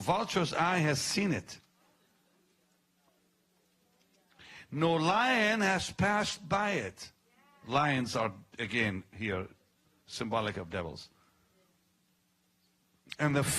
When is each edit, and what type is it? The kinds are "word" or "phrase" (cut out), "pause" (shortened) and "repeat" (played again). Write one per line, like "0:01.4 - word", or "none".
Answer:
none

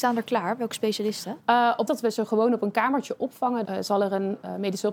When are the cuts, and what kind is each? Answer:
0:01.9 - word
0:03.6 - word

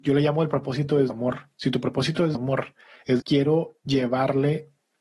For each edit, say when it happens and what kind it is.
0:01.1 - word
0:02.3 - word
0:03.2 - word

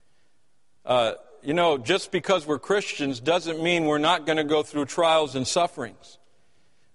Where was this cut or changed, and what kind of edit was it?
none

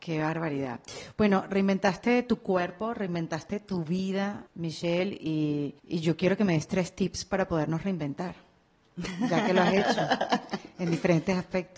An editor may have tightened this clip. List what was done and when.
0:04.5 - pause
0:05.8 - pause

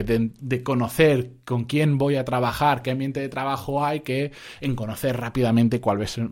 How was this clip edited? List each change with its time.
none

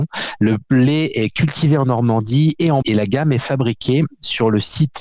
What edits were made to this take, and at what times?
0:02.8 - word

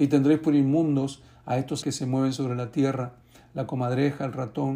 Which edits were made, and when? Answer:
0:01.8 - word

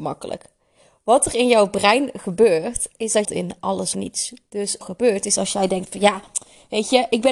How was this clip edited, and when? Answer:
0:03.2 - phrase
0:03.9 - word
0:04.8 - phrase

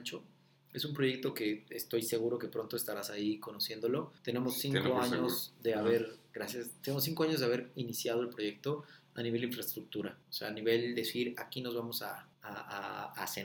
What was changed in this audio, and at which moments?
0:04.2 - pause
0:10.2 - pause
0:12.3 - pause

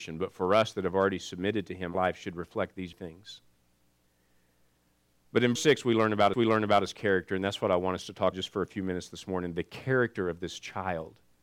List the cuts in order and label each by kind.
0:01.9 - word
0:02.9 - word
0:05.6 - word
0:06.3 - repeat
0:08.3 - word

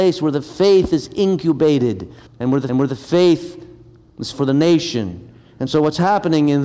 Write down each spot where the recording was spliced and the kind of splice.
0:02.3 - pause
0:02.7 - repeat
0:04.3 - word

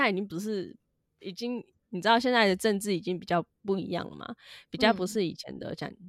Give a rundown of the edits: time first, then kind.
none

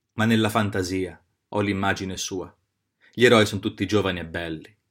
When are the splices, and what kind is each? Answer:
none

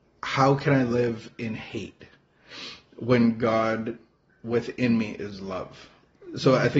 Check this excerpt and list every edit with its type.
none

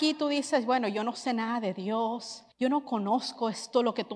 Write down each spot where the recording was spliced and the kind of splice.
0:02.5 - pause

